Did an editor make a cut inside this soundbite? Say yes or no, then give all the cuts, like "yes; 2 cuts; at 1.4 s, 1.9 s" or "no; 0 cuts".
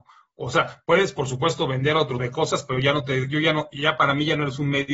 yes; 1 cut; at 2.2 s